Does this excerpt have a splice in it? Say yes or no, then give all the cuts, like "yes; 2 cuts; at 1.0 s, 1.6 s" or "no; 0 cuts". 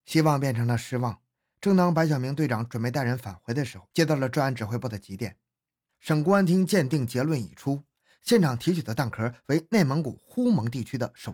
no; 0 cuts